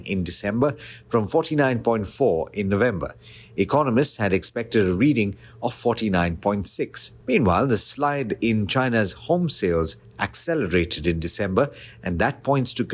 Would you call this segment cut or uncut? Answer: uncut